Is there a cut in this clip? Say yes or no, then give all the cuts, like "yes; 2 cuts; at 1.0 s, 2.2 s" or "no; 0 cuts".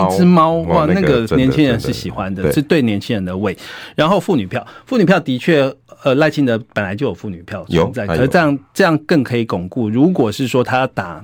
no; 0 cuts